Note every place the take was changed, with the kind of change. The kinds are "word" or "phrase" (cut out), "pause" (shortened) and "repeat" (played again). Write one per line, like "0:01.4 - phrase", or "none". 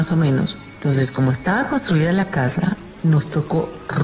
none